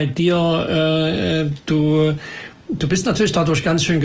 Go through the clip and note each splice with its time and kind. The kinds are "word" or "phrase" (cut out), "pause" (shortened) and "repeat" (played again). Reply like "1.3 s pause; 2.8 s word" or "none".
none

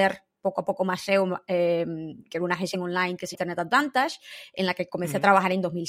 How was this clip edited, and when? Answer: 2.2 s pause; 2.7 s phrase; 3.3 s word

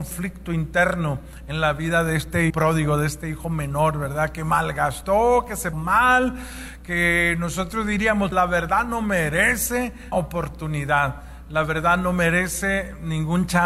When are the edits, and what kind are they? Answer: 2.5 s word; 5.7 s word; 8.3 s word; 10.1 s word

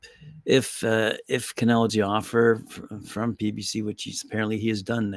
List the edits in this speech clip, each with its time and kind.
1.9 s phrase

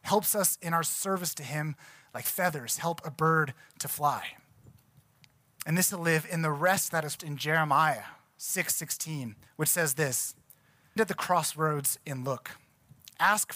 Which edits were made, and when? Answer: 5.9 s phrase; 7.2 s word; 9.5 s pause; 11.0 s word

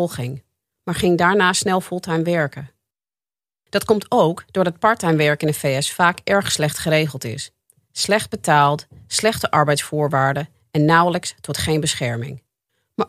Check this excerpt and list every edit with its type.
none

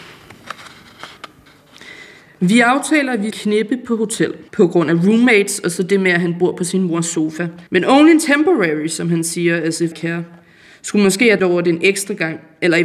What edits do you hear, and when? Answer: 2.2 s pause; 3.3 s word; 4.5 s pause; 7.7 s pause; 9.9 s word; 11.4 s word

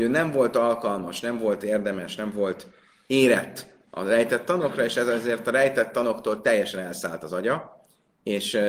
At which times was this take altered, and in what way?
none

